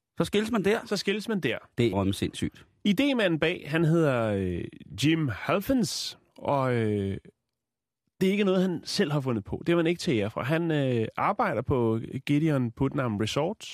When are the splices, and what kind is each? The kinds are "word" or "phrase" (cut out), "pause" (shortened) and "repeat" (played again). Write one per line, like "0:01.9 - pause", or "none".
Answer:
0:01.9 - word